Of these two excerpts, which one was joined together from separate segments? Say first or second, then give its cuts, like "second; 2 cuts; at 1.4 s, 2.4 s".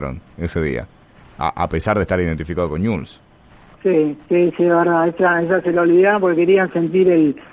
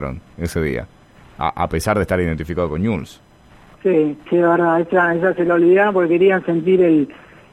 second; 1 cut; at 4.3 s